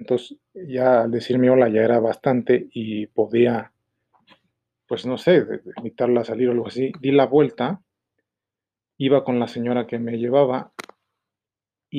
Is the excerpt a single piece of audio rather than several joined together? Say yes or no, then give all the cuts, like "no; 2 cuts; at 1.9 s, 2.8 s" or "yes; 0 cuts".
yes; 0 cuts